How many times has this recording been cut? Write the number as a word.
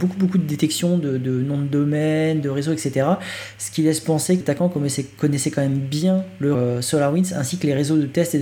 two